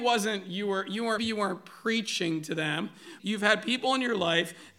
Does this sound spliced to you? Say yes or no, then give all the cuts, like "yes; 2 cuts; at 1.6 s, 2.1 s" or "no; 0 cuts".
yes; 2 cuts; at 1.2 s, 3.2 s